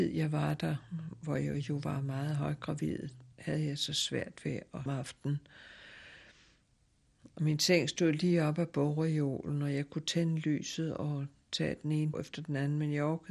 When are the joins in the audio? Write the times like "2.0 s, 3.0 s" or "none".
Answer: 3.3 s, 4.9 s, 12.1 s